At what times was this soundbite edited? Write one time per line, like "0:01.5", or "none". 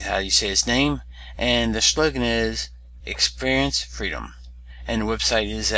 none